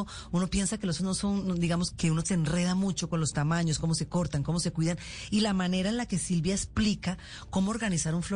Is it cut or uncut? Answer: cut